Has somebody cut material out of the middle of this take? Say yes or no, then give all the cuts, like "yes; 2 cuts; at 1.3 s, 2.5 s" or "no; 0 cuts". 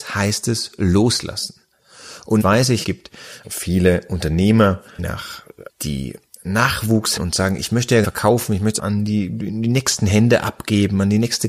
yes; 8 cuts; at 2.4 s, 2.8 s, 3.4 s, 5.0 s, 5.7 s, 7.2 s, 8.0 s, 8.8 s